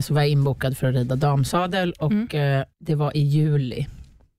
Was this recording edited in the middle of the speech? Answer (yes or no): yes